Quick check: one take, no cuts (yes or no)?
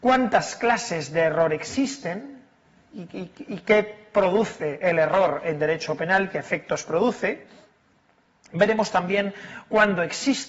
yes